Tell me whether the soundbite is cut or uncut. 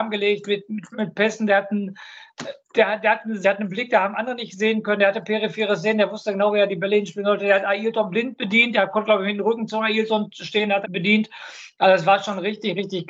cut